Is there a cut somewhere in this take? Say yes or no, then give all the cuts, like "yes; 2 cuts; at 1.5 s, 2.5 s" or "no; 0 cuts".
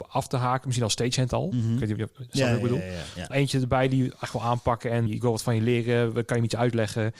yes; 2 cuts; at 3.3 s, 5.1 s